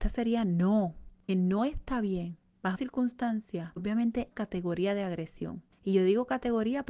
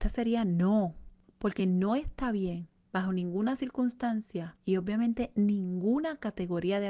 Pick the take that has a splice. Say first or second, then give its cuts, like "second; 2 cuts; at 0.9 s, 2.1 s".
first; 4 cuts; at 1.3 s, 2.7 s, 3.8 s, 4.3 s